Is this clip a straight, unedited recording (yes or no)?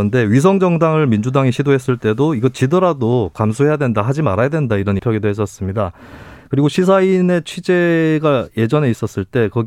no